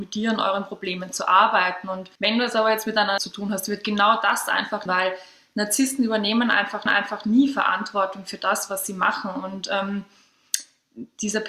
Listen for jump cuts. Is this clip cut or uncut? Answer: cut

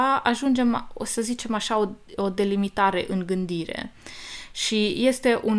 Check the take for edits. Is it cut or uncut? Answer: uncut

